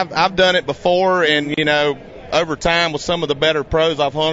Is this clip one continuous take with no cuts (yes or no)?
yes